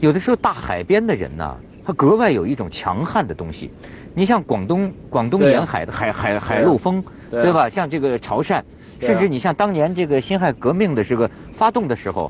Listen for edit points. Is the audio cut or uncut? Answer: uncut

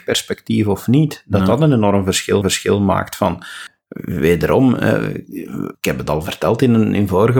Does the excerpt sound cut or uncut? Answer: cut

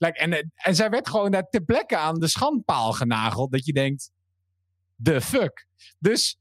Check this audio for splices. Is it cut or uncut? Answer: uncut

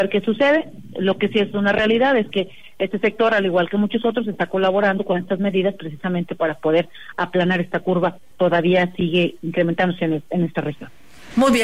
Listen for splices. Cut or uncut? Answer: cut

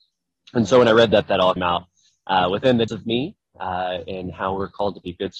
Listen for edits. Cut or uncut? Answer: cut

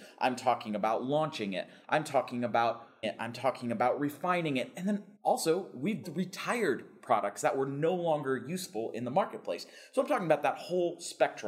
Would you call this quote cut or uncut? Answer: cut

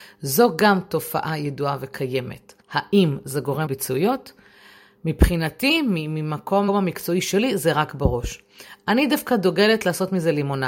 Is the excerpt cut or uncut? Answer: cut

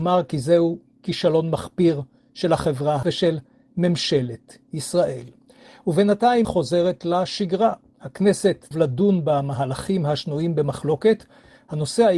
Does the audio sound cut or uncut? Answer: cut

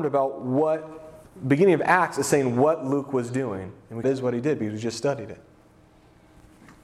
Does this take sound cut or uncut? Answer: cut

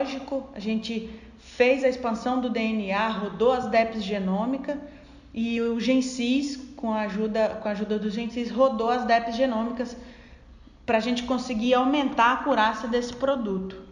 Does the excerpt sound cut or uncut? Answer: uncut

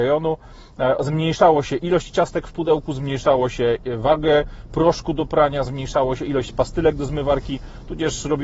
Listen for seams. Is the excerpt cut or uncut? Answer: uncut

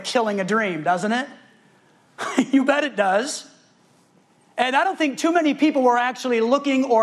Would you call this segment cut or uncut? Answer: uncut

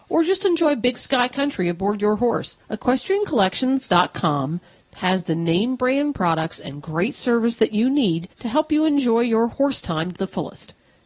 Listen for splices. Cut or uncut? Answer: cut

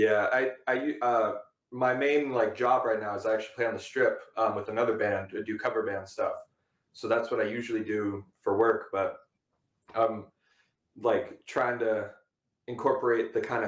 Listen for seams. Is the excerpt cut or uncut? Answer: uncut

